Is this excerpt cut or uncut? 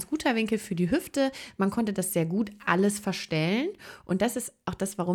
uncut